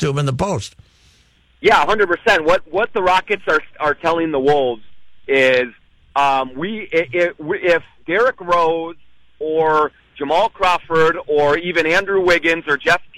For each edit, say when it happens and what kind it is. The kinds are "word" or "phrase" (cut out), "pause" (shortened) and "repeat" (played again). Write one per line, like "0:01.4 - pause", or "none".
none